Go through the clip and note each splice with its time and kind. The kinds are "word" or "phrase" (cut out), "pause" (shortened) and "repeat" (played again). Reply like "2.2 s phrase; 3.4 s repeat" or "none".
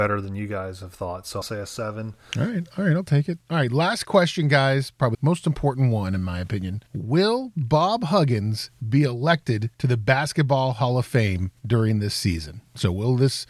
1.4 s phrase; 5.1 s word; 6.9 s pause; 9.7 s pause; 11.6 s pause